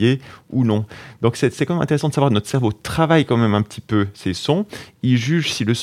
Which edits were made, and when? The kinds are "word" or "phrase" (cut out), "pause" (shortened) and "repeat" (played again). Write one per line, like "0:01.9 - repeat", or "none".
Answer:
none